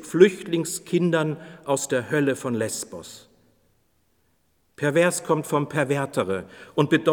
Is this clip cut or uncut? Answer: uncut